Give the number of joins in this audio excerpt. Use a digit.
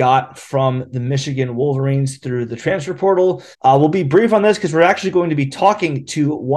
1